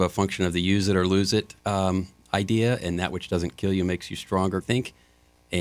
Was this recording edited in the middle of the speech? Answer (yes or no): yes